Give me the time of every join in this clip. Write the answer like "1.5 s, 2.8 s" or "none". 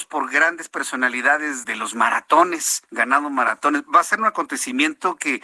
1.6 s, 2.9 s